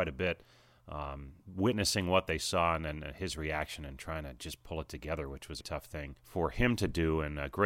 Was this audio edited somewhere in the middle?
yes; 3 cuts; at 1.4 s, 5.6 s, 6.2 s

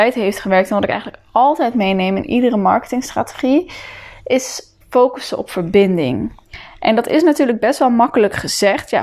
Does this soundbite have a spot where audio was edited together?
yes; 1 cut; at 4.8 s

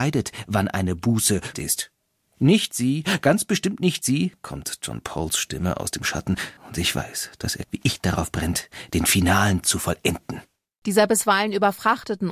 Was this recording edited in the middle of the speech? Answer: yes; 4 cuts; at 1.5 s, 6.6 s, 7.6 s, 9.6 s

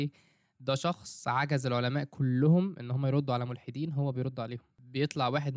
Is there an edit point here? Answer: no; 0 cuts

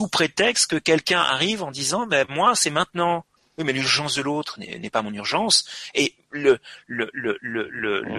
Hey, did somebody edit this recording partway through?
yes; 1 cut; at 3.4 s

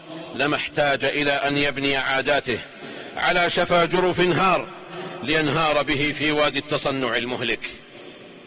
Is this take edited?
no; 0 cuts

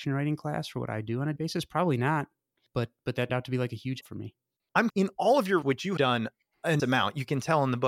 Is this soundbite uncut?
no; 7 cuts; at 1.4 s, 3.3 s, 4.0 s, 4.9 s, 5.6 s, 6.0 s, 6.8 s

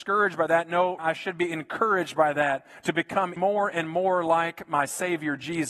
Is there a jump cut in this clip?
yes; 2 cuts; at 1.0 s, 3.4 s

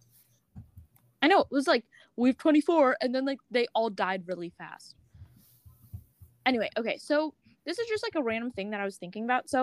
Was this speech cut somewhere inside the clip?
no; 0 cuts

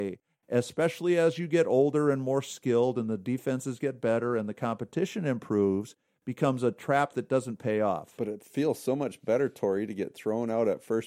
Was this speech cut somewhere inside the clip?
no; 0 cuts

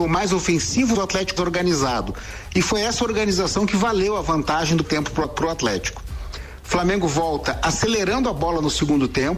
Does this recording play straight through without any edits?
no; 3 cuts; at 0.9 s, 1.4 s, 4.8 s

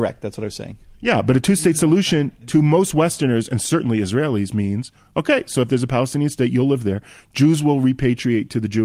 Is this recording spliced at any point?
no; 0 cuts

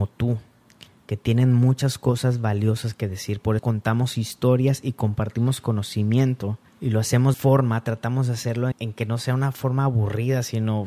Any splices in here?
yes; 4 cuts; at 3.6 s, 6.7 s, 7.3 s, 8.7 s

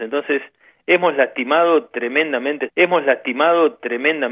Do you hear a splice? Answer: yes; 1 cut; at 2.7 s

